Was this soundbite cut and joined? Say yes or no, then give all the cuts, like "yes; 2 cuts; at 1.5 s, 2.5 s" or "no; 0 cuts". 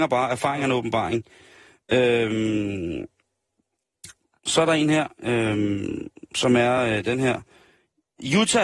no; 0 cuts